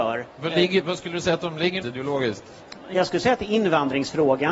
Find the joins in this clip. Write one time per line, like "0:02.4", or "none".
0:01.8